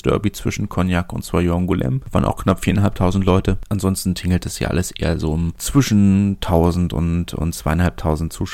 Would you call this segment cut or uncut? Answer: uncut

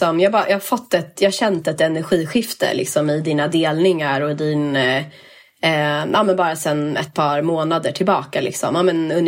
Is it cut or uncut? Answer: uncut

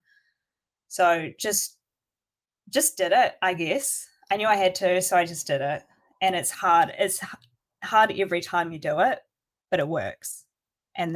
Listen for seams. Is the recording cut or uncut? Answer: uncut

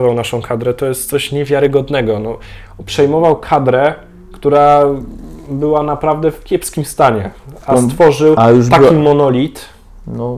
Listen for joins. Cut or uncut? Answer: uncut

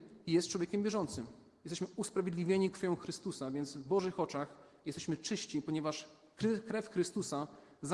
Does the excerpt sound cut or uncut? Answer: uncut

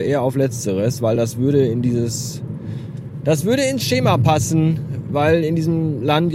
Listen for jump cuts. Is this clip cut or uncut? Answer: uncut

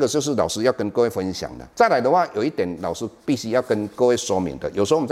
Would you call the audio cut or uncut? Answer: cut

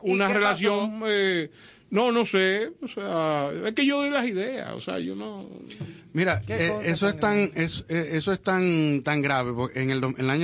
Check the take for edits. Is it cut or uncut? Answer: uncut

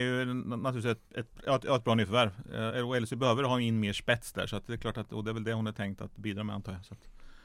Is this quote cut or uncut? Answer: cut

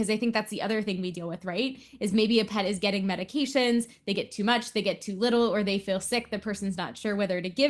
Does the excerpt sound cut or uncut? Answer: uncut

